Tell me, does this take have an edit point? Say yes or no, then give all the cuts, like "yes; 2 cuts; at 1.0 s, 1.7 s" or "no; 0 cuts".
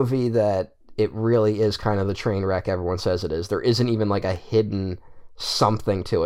no; 0 cuts